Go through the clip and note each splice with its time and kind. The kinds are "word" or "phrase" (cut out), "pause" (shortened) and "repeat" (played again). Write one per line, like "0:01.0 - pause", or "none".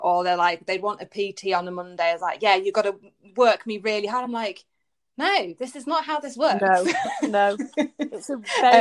none